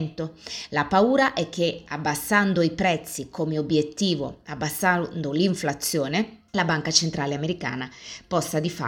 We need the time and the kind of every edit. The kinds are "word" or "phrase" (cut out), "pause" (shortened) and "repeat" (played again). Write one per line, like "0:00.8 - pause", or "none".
0:06.5 - pause